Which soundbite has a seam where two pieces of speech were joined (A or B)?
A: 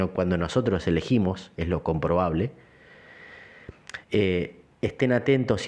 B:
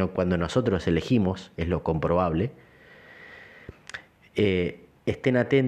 A